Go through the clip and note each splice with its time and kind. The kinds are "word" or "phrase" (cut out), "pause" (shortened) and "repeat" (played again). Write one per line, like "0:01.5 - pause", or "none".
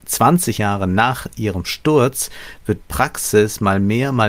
0:02.8 - word